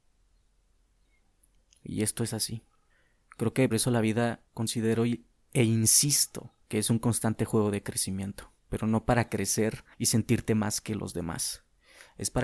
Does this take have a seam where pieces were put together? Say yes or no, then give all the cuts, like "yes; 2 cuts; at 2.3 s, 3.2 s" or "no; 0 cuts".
yes; 6 cuts; at 2.9 s, 3.7 s, 4.5 s, 6.6 s, 8.6 s, 9.9 s